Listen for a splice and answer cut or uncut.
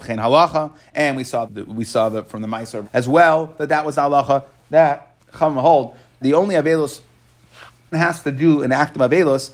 cut